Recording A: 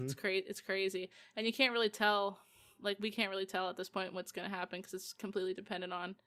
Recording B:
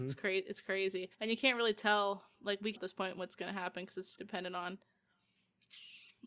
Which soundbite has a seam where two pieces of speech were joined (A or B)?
B